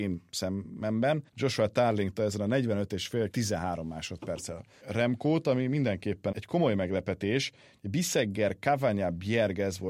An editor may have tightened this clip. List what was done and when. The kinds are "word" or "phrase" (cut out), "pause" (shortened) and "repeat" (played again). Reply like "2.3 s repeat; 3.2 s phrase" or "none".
1.3 s pause; 2.1 s word; 3.3 s phrase; 4.8 s word; 6.3 s word

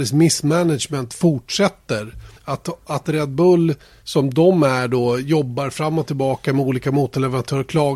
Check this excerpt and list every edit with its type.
2.4 s pause; 3.8 s pause

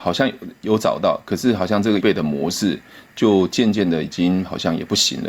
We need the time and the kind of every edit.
2.0 s word

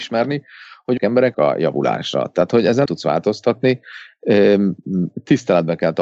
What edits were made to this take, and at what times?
1.0 s word; 1.3 s phrase; 2.9 s word

